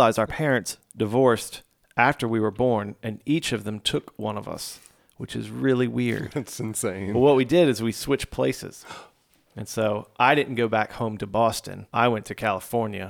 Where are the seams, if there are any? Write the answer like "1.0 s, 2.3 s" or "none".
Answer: none

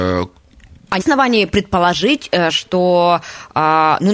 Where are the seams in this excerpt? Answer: 1.0 s

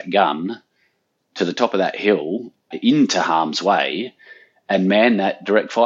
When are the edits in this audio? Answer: 2.7 s

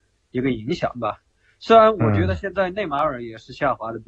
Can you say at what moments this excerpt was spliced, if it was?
none

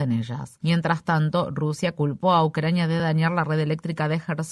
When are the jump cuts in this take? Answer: none

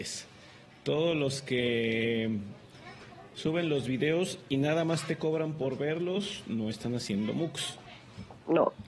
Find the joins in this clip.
none

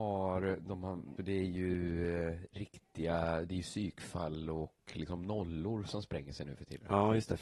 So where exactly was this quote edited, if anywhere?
1.2 s

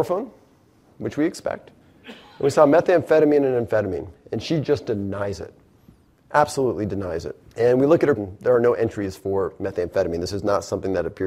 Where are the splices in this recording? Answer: 7.5 s, 8.2 s

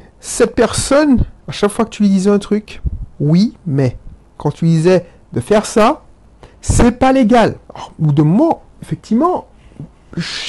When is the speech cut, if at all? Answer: 1.4 s, 3.1 s, 7.6 s, 8.7 s

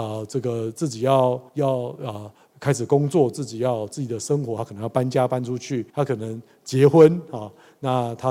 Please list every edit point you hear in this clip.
1.5 s, 5.9 s

